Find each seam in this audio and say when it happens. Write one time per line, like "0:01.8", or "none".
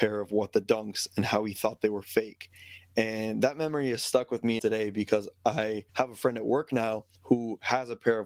0:04.6
0:05.9
0:07.2